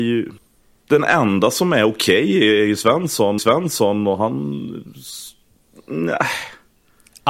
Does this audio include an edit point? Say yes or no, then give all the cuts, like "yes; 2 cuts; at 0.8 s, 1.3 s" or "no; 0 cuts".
yes; 1 cut; at 3.4 s